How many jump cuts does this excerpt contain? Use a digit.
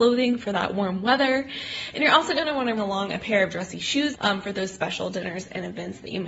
2